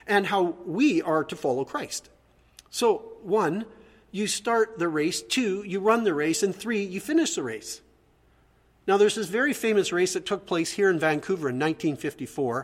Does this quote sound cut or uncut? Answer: uncut